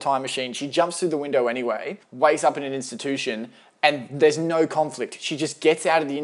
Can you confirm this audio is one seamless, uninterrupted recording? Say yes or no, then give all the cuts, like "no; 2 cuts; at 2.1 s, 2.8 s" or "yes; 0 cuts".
no; 1 cut; at 2.0 s